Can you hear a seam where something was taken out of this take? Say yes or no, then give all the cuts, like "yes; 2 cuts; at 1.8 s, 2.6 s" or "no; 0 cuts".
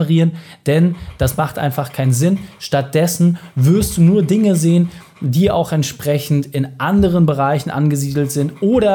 no; 0 cuts